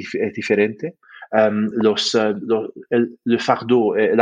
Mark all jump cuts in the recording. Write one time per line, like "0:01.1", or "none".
none